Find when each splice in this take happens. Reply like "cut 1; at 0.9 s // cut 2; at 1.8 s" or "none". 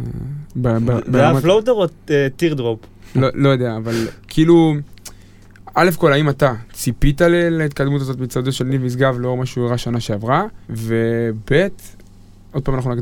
cut 1; at 4.2 s // cut 2; at 10.6 s